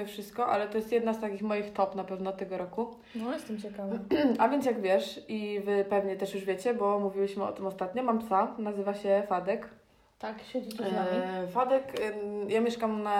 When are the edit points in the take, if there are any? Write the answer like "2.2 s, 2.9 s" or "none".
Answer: none